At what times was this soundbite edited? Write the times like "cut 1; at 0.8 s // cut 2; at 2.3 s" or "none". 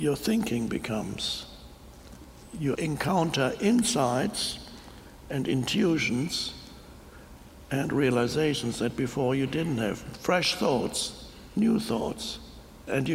cut 1; at 2.7 s